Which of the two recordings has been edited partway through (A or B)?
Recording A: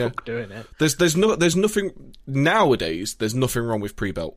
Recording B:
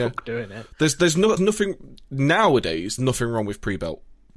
B